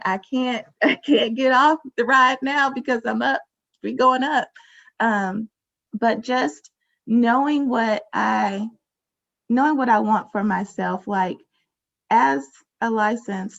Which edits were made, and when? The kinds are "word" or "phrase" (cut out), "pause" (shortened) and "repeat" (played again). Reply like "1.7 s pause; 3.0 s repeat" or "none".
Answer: none